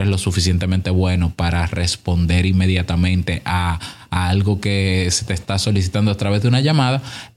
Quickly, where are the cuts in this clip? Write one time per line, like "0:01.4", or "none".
none